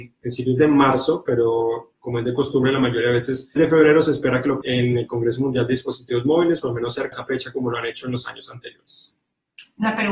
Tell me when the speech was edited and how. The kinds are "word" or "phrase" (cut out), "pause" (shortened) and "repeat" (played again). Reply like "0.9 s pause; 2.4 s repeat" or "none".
3.6 s word; 4.6 s word; 7.1 s word